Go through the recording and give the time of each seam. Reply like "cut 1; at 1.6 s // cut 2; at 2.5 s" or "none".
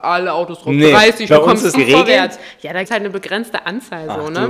cut 1; at 1.3 s // cut 2; at 1.7 s // cut 3; at 2.8 s